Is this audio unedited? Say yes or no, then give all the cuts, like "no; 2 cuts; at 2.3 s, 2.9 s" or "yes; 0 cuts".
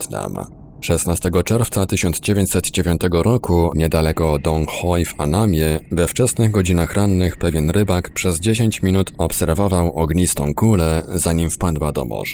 yes; 0 cuts